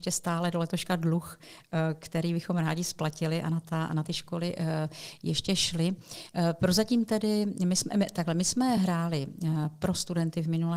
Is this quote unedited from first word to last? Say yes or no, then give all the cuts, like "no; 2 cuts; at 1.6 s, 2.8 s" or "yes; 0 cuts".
yes; 0 cuts